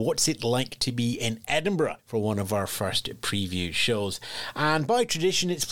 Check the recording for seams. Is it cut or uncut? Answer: cut